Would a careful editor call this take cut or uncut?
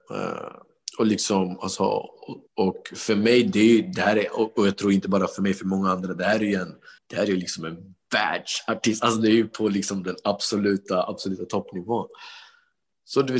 cut